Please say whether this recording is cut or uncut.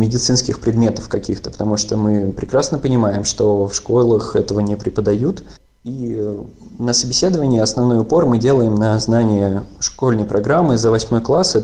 uncut